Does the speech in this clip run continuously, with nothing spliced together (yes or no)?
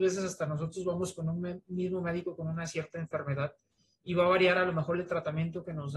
yes